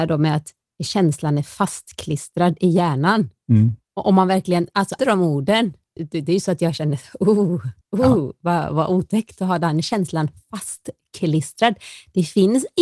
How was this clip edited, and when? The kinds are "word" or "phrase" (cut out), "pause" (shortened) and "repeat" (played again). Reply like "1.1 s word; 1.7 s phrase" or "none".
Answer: 5.0 s word; 6.0 s word; 7.8 s pause